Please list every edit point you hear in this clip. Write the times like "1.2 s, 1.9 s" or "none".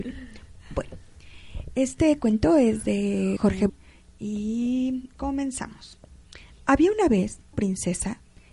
3.4 s, 3.7 s, 7.5 s